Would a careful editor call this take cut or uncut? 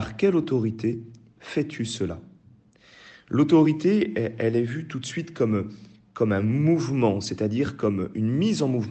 uncut